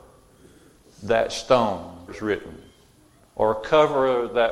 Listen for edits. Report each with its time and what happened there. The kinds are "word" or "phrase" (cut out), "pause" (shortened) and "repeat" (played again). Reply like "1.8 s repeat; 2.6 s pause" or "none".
2.1 s word

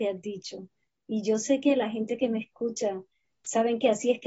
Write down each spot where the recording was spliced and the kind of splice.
none

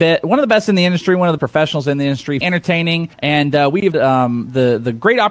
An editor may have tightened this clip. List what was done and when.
1.4 s word; 2.4 s word; 3.1 s pause; 3.9 s word

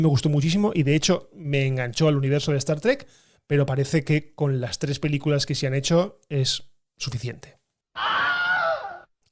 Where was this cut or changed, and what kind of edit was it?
none

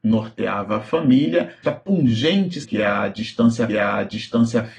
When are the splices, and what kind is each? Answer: 1.6 s word; 2.6 s word; 3.7 s repeat

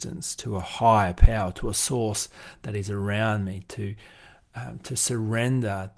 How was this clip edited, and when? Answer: none

